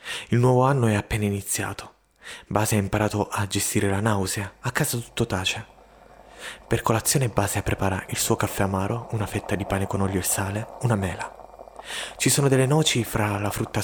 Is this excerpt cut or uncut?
uncut